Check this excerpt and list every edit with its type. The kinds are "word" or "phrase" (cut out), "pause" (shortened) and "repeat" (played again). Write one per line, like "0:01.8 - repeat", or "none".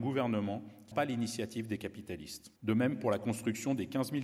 0:00.9 - word
0:02.6 - pause